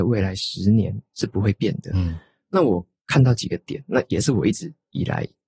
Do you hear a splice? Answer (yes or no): no